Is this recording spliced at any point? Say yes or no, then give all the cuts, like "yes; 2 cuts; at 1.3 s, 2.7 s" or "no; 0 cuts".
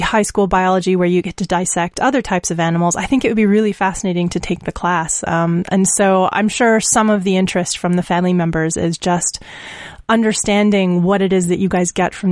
no; 0 cuts